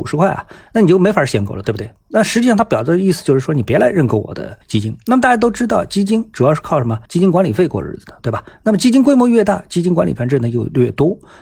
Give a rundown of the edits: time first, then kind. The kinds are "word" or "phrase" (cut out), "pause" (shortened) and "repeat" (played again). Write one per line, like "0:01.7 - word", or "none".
0:04.6 - pause
0:07.1 - pause